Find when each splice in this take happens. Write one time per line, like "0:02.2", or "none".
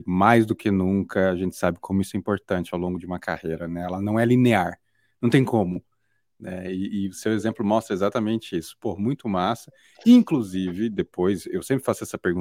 none